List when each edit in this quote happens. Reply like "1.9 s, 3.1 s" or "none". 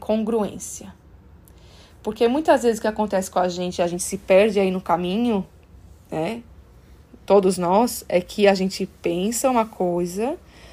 none